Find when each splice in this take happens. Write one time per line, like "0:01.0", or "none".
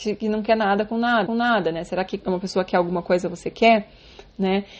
0:01.3
0:02.2

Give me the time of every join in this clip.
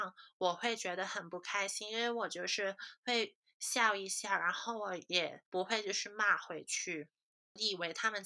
0:05.5

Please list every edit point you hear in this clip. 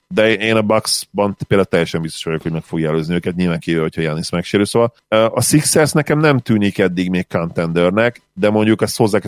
none

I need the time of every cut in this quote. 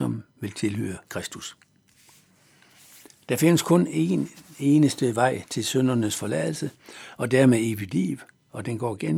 0:01.0

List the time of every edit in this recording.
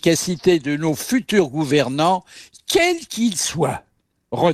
none

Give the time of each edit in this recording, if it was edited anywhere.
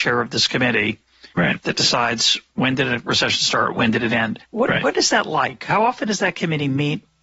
0:01.3
0:02.5
0:04.4

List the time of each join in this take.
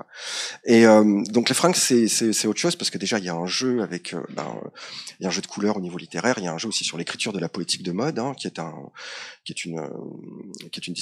none

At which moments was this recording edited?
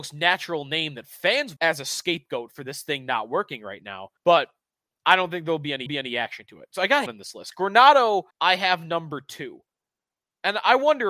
0:01.6
0:04.2
0:05.9
0:07.1
0:08.3

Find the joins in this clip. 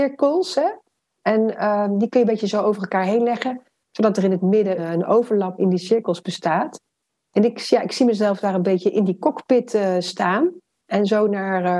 0:04.8
0:05.6

